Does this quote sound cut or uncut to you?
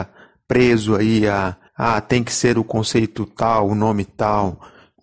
cut